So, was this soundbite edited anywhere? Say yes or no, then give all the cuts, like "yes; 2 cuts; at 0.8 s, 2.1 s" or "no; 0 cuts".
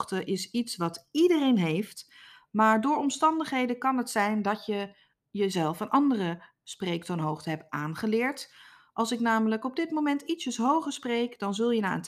no; 0 cuts